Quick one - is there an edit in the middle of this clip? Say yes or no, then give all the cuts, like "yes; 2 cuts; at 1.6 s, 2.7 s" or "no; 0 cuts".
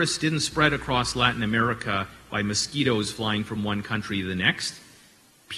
no; 0 cuts